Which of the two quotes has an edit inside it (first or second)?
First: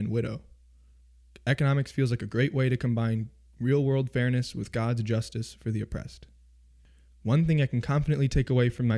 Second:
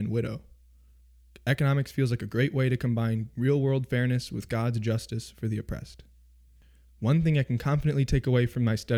second